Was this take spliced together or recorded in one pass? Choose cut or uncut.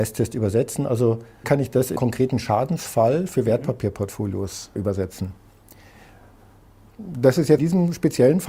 cut